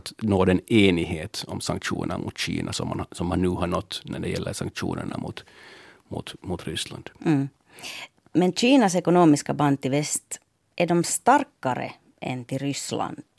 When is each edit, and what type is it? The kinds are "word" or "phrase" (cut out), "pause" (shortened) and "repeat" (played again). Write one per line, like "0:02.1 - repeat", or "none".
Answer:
none